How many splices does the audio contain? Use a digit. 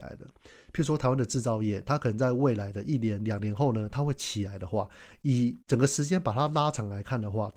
1